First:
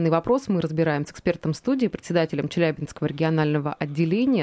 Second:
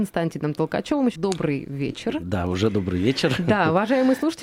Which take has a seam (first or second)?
second